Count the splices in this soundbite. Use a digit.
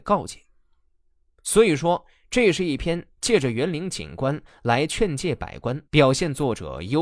1